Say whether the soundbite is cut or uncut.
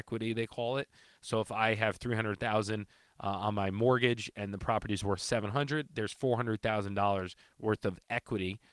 uncut